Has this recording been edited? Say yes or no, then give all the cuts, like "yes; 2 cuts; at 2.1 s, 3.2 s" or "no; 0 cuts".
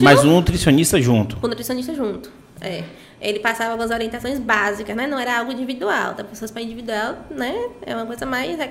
no; 0 cuts